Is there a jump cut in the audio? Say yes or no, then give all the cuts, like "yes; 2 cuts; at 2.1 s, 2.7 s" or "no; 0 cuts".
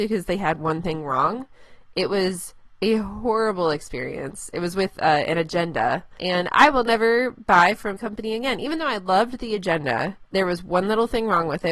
yes; 1 cut; at 8.0 s